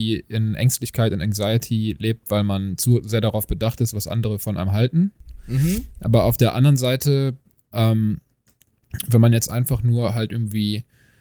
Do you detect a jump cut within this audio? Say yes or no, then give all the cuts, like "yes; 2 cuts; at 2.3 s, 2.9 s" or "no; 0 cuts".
no; 0 cuts